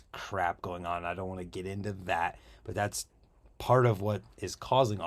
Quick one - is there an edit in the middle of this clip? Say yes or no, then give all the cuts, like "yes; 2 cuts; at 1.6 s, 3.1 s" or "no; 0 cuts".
no; 0 cuts